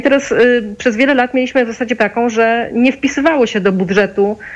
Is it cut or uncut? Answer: cut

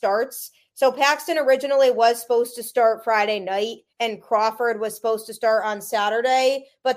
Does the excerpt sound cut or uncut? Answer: cut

